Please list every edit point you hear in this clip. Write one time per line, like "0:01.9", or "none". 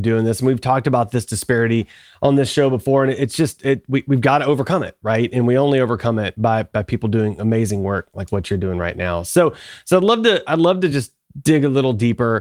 none